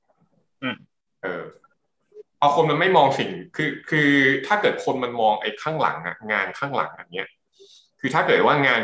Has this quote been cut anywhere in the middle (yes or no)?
no